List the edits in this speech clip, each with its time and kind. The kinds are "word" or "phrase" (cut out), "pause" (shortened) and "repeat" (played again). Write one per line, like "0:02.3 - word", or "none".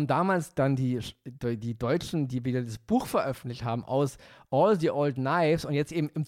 none